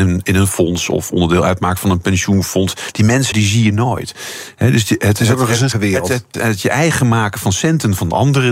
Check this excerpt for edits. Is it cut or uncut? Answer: cut